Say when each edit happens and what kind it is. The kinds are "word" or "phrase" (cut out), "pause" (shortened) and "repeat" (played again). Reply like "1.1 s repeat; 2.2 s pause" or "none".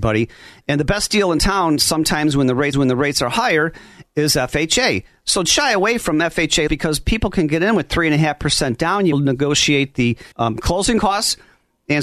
2.7 s repeat; 5.4 s word; 6.7 s word; 9.1 s phrase; 10.3 s pause